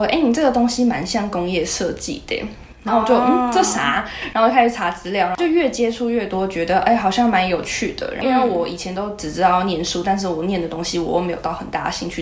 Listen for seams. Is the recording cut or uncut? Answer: uncut